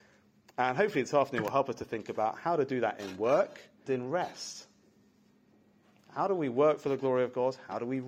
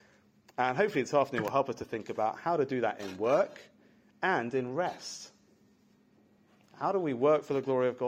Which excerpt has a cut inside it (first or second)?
first